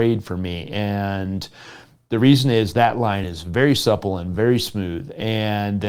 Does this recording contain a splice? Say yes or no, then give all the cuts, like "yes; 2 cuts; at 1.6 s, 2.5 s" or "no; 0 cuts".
no; 0 cuts